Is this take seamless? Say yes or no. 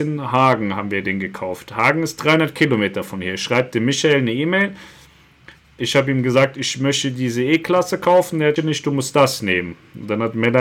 no